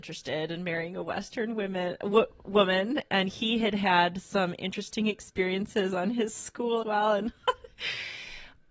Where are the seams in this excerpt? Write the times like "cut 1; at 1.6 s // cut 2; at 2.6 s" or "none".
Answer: cut 1; at 6.8 s